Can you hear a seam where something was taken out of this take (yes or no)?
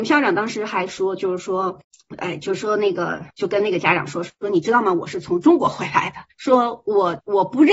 yes